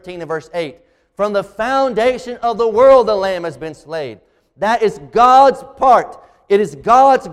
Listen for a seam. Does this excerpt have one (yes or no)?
no